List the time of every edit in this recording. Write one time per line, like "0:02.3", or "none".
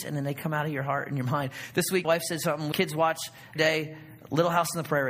0:02.0
0:02.7
0:03.6